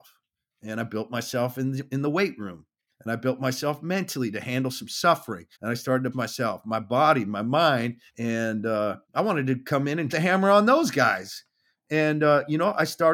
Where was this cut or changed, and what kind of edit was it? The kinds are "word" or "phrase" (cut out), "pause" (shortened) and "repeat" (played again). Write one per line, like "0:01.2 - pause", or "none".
0:04.8 - word
0:05.5 - pause
0:06.1 - word
0:08.1 - pause
0:09.0 - pause
0:10.1 - word